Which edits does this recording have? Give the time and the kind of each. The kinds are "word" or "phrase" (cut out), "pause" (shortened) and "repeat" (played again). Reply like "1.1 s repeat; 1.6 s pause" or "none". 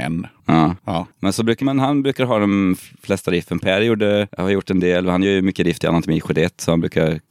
1.6 s word